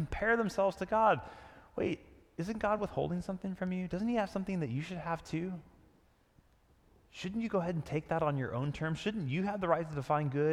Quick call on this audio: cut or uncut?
uncut